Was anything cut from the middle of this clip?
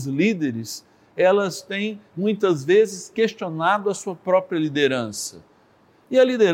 no; 0 cuts

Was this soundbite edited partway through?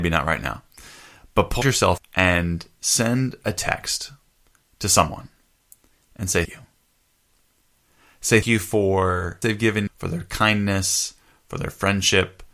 yes; 6 cuts; at 1.6 s, 2.0 s, 6.5 s, 8.4 s, 9.4 s, 9.9 s

